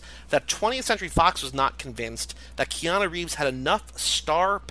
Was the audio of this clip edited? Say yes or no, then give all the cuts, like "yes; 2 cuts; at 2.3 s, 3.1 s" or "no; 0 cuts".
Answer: no; 0 cuts